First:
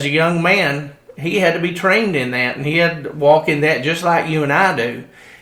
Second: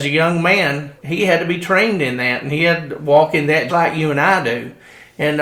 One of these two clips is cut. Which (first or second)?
second